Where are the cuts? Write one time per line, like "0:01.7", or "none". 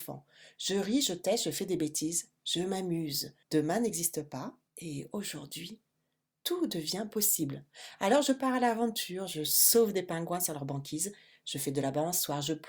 0:03.4
0:04.7